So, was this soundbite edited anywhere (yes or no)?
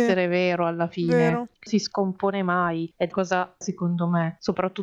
yes